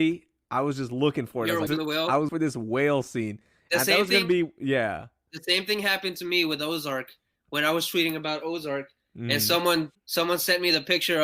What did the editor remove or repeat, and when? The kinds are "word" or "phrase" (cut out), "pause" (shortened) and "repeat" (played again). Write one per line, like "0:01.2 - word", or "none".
0:01.7 - word
0:02.3 - word
0:09.9 - word